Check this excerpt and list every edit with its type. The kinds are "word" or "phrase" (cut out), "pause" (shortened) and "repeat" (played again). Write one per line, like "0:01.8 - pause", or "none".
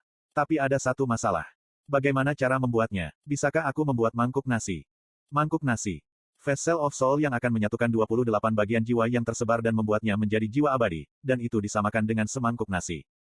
none